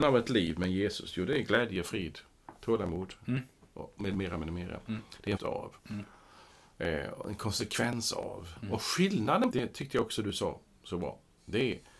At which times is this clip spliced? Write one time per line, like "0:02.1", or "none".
0:05.4
0:05.8
0:09.5